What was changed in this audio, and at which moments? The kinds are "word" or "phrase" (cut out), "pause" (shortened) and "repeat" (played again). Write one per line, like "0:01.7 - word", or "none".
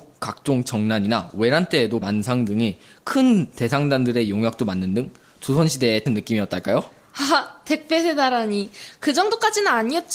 0:02.0 - phrase
0:06.1 - phrase